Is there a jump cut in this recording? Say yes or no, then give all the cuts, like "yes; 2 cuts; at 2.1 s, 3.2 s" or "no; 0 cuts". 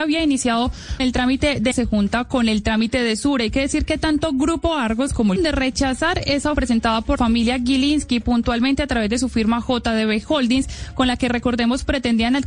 yes; 5 cuts; at 1.0 s, 1.7 s, 5.4 s, 6.5 s, 7.2 s